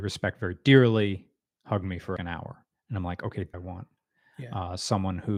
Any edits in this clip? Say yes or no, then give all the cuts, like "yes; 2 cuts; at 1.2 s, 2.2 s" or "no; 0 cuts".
yes; 2 cuts; at 2.2 s, 3.5 s